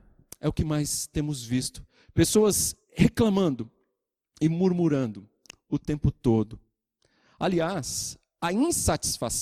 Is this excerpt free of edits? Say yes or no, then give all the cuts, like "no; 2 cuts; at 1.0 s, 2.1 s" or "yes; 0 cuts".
yes; 0 cuts